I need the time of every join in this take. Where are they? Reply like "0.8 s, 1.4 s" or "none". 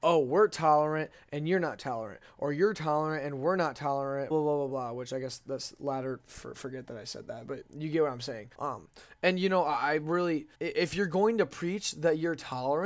4.3 s, 8.5 s, 10.5 s